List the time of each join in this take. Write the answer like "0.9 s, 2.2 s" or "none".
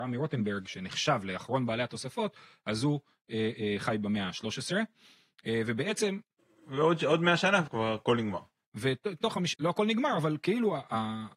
7.7 s, 9.5 s

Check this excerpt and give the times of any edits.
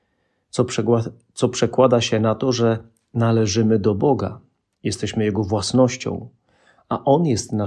none

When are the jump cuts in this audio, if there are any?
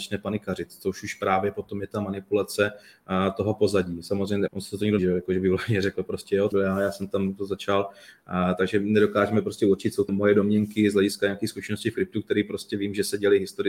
4.5 s, 5.0 s, 6.5 s, 10.1 s

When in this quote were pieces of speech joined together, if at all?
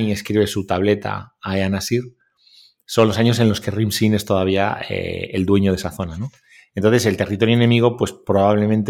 none

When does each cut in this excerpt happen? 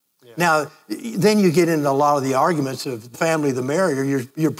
3.1 s

